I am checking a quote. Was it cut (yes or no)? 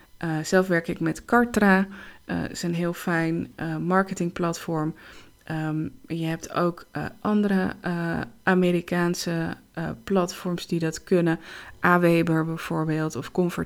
no